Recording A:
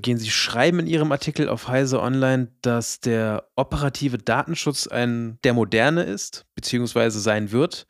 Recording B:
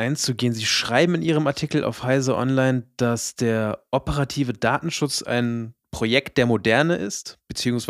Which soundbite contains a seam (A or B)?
A